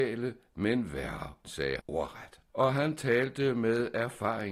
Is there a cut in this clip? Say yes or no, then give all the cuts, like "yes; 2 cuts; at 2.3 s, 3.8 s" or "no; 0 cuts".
yes; 3 cuts; at 1.4 s, 1.8 s, 2.5 s